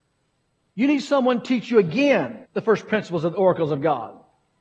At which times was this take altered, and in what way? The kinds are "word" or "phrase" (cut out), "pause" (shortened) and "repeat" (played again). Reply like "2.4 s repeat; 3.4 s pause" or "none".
2.4 s pause